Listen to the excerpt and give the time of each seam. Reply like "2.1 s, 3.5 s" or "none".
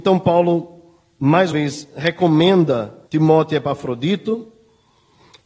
1.5 s, 3.0 s

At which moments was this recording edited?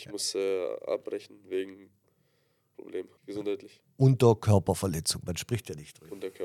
2.7 s, 3.2 s

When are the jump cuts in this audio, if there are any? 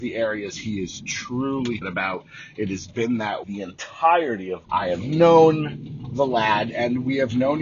1.8 s, 3.4 s, 4.6 s

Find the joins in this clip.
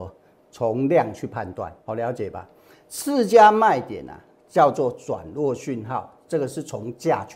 1.8 s

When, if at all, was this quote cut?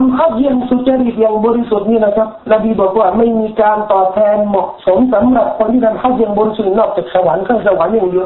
2.4 s

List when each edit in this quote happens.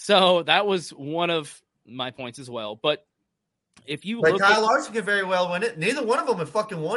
none

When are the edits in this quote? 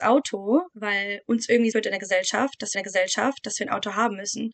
1.7 s, 2.7 s

